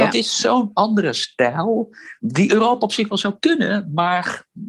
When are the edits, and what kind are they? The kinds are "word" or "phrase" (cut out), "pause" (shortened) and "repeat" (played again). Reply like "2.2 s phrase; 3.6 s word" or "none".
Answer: 2.2 s pause